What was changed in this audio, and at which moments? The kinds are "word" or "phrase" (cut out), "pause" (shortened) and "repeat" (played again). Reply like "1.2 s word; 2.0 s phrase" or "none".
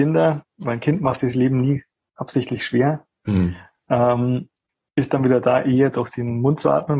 none